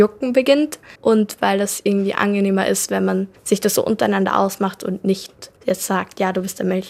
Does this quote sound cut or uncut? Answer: cut